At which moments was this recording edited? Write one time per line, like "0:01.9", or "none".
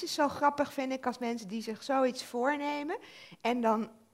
none